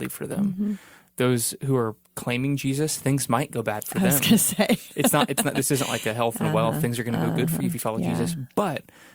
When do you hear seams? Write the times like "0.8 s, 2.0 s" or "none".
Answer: 2.0 s